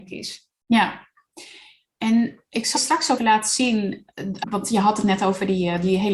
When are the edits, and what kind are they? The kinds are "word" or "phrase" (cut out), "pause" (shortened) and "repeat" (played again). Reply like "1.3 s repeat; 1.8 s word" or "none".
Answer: 2.0 s word; 2.8 s word; 3.2 s word; 4.4 s word